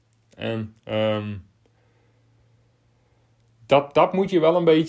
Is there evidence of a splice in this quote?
yes; 1 cut; at 3.9 s

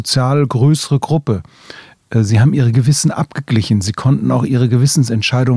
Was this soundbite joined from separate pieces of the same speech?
no; 0 cuts

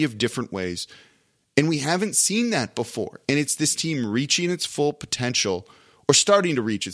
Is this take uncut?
yes; 0 cuts

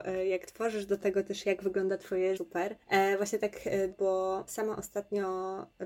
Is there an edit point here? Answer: yes; 4 cuts; at 2.4 s, 2.8 s, 3.9 s, 4.5 s

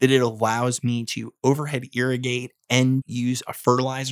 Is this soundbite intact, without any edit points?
no; 1 cut; at 3.0 s

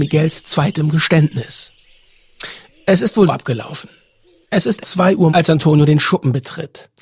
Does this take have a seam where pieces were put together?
yes; 3 cuts; at 3.3 s, 4.8 s, 5.3 s

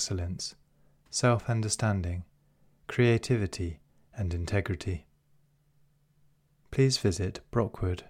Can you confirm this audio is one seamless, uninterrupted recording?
yes; 0 cuts

